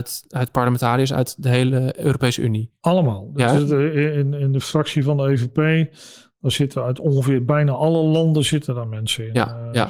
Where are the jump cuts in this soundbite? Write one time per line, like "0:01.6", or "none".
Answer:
none